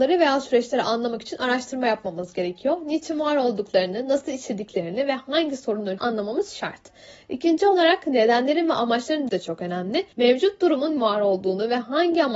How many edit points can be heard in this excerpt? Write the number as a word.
four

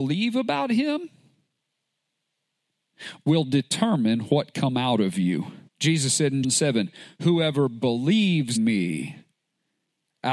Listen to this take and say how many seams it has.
four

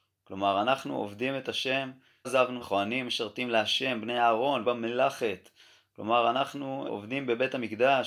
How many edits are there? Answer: four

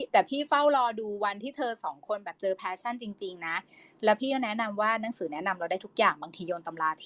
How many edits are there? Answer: zero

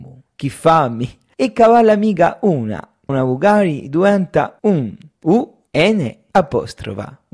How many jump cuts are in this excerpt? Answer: one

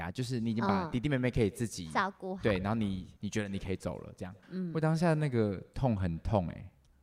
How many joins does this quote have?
two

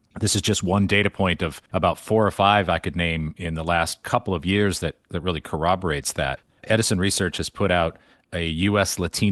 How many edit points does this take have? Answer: zero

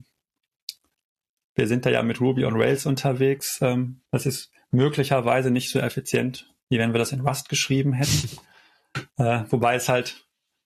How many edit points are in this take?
two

